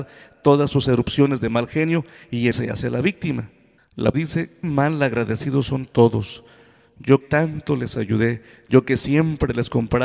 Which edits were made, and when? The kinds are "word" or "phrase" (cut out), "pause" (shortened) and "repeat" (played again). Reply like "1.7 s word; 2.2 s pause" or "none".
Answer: 2.5 s word; 4.1 s word; 4.6 s word; 7.2 s word